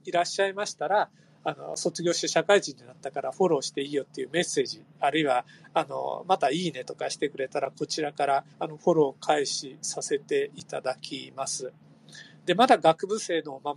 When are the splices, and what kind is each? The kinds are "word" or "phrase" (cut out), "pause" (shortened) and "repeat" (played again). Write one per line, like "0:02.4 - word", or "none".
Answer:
0:08.5 - pause